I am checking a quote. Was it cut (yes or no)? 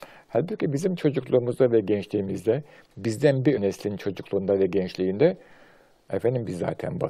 yes